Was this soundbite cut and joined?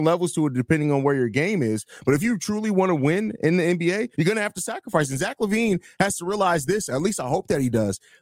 yes; 1 cut; at 4.1 s

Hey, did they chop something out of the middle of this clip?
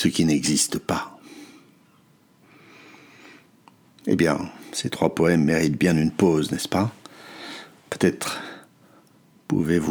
no; 0 cuts

